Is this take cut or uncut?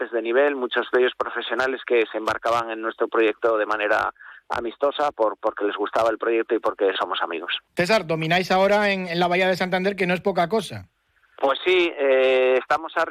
cut